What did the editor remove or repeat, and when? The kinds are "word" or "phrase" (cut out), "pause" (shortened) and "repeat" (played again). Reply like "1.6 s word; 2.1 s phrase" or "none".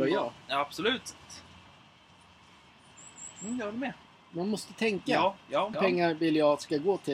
4.0 s pause; 5.7 s word